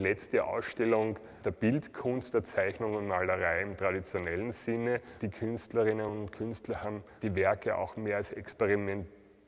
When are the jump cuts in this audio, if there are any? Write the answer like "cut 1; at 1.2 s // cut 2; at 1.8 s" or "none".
none